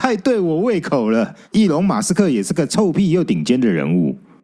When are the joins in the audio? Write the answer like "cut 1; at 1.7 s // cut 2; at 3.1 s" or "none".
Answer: cut 1; at 1.4 s

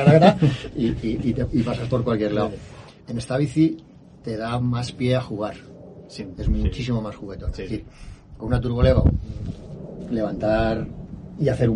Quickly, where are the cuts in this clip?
cut 1; at 3.0 s

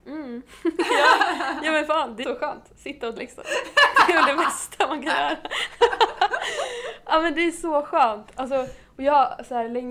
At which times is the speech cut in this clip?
cut 1; at 2.2 s // cut 2; at 3.2 s

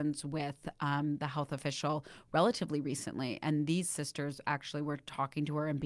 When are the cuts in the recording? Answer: none

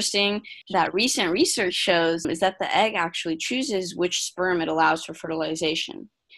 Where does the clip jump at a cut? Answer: none

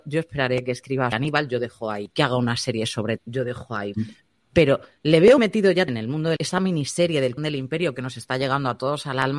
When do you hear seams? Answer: cut 1; at 1.1 s // cut 2; at 2.1 s // cut 3; at 3.2 s // cut 4; at 3.9 s // cut 5; at 5.4 s // cut 6; at 5.9 s // cut 7; at 6.4 s // cut 8; at 7.4 s

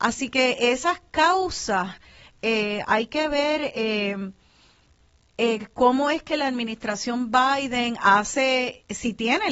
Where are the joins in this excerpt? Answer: none

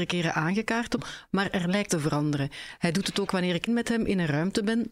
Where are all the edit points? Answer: cut 1; at 1.0 s // cut 2; at 1.9 s // cut 3; at 3.3 s // cut 4; at 3.7 s

